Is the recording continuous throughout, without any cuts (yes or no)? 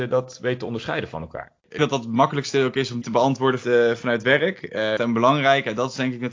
no